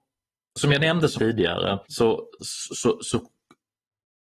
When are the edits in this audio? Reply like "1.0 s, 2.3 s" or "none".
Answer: 1.2 s, 1.8 s